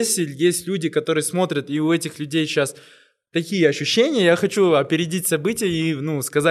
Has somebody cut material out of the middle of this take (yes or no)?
no